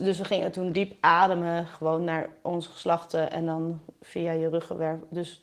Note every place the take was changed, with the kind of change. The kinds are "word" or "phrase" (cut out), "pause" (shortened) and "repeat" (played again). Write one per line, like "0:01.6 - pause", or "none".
none